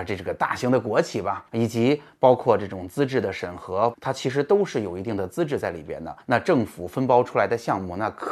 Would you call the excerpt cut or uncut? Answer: cut